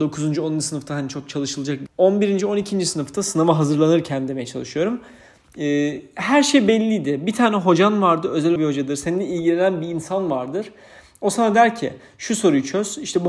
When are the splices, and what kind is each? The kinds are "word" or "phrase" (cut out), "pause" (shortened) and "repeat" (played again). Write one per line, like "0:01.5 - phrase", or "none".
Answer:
0:01.9 - phrase
0:08.6 - phrase

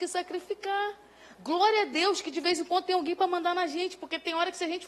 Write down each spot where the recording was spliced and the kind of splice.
none

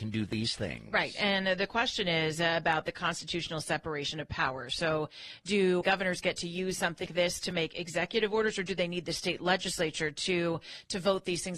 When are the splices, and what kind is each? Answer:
0:05.8 - word
0:07.1 - word

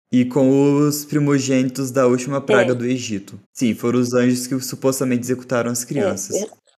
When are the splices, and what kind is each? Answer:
0:03.4 - pause

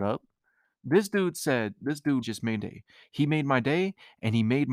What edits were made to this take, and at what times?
0:01.8 - phrase
0:02.2 - word
0:02.6 - word

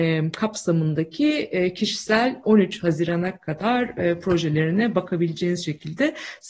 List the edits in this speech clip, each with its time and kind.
0:02.4 - phrase

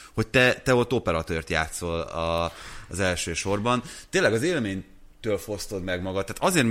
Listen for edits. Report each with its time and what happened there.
none

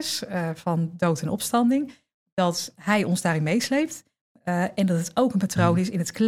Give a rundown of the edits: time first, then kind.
none

